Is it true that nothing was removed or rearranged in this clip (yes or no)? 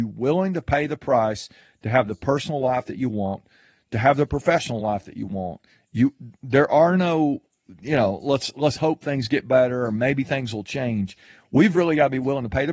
yes